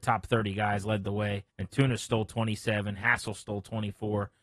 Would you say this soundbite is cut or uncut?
cut